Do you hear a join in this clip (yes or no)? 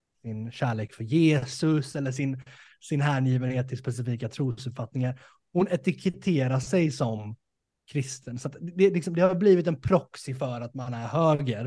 no